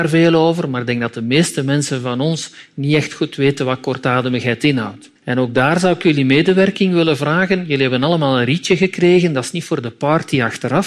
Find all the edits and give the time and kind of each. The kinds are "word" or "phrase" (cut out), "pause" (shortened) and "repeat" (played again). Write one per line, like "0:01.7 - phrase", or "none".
0:05.2 - pause